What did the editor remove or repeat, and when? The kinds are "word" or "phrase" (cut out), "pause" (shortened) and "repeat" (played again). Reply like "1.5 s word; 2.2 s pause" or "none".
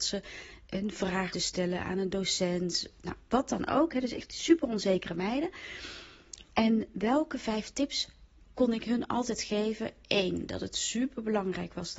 1.3 s word